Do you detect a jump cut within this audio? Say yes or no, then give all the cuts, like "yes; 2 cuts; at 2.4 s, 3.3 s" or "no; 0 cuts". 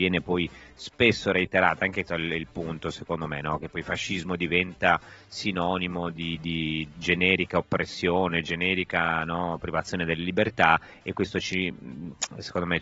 yes; 1 cut; at 2.1 s